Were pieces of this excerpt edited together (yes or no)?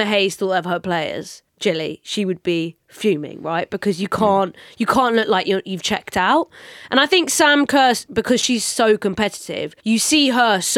yes